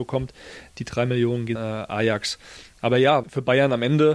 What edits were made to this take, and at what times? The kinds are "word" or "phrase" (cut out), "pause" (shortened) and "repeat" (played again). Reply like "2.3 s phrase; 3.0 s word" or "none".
1.5 s phrase; 3.2 s word